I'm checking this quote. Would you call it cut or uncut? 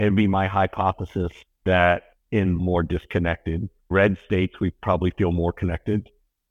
cut